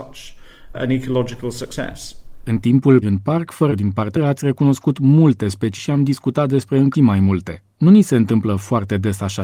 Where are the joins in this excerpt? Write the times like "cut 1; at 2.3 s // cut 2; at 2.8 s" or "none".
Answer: cut 1; at 3.0 s // cut 2; at 3.7 s // cut 3; at 4.2 s // cut 4; at 5.8 s // cut 5; at 6.9 s